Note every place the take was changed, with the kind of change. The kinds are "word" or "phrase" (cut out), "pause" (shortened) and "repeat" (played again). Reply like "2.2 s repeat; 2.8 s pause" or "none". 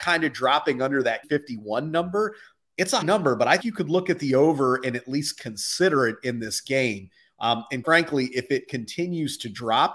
1.2 s word; 3.0 s word; 3.6 s word; 7.8 s word